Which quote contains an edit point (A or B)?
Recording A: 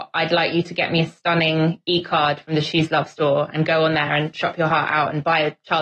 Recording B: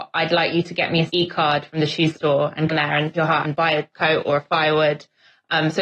B